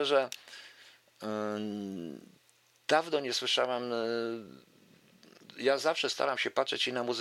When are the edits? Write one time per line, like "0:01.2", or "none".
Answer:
none